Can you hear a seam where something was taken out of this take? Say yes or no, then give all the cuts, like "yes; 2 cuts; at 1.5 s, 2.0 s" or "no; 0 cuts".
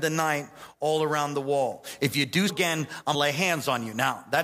yes; 2 cuts; at 2.5 s, 3.1 s